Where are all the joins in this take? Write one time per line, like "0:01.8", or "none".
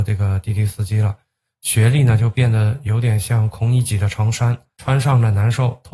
none